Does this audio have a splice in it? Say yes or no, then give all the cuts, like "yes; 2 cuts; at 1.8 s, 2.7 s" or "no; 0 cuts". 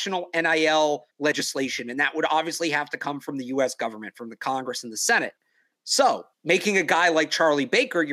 yes; 2 cuts; at 1.1 s, 6.3 s